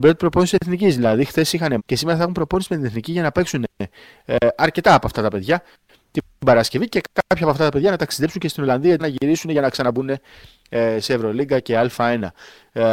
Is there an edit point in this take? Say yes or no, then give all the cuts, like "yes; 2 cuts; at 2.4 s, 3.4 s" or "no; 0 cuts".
yes; 2 cuts; at 1.8 s, 9.0 s